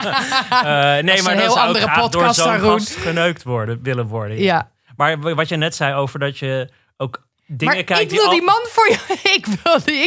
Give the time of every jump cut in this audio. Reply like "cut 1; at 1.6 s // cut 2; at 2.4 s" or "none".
none